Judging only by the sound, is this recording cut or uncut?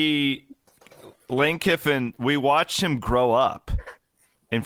uncut